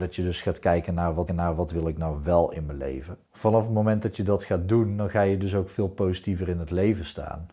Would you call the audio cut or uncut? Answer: cut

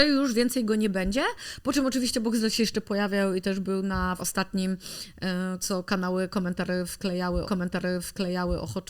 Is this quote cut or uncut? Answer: cut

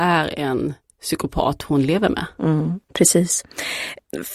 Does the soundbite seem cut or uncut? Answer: cut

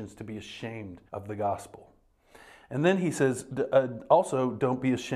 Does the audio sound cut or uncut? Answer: cut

